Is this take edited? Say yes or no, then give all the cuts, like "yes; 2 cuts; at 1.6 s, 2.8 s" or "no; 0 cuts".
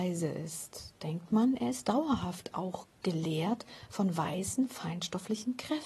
yes; 1 cut; at 2.9 s